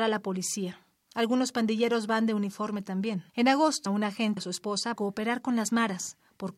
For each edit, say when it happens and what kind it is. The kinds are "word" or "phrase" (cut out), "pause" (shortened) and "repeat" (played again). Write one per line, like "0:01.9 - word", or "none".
0:03.3 - pause
0:03.9 - word
0:04.4 - word
0:05.0 - word